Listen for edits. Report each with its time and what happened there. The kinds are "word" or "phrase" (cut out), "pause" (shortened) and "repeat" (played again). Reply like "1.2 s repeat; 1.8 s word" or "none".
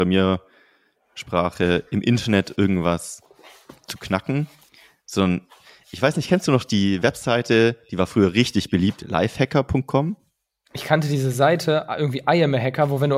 none